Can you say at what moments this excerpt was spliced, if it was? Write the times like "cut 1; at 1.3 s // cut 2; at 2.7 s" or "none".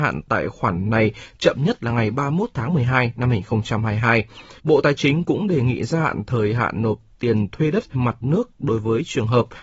cut 1; at 4.6 s // cut 2; at 7.9 s